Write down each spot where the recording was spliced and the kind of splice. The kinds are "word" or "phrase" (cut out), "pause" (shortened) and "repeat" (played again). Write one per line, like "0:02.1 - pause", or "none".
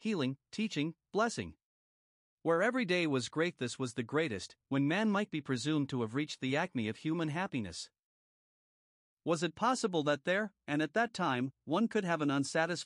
none